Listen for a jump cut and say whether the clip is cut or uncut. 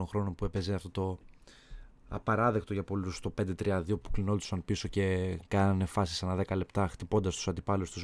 uncut